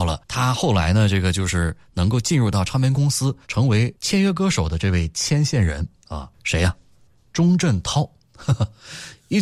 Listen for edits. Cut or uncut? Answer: cut